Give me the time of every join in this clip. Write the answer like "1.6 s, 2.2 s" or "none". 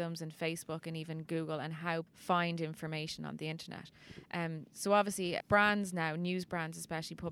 2.1 s, 5.4 s